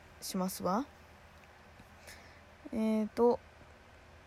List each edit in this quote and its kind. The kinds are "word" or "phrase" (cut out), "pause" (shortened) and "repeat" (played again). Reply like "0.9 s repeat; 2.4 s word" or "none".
3.1 s word